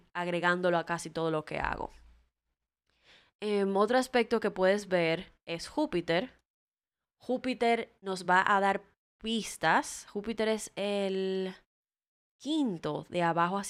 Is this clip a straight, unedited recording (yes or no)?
yes